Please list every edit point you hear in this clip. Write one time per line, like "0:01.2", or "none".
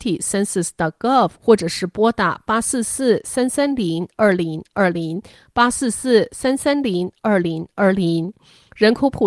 0:01.4